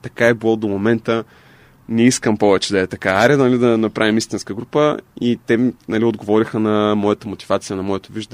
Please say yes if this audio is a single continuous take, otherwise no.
yes